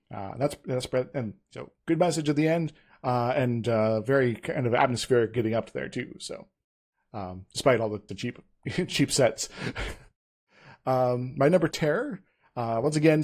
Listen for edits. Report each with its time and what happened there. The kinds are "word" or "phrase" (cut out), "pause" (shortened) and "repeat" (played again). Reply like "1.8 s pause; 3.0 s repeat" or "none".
1.8 s pause; 8.1 s word; 11.7 s phrase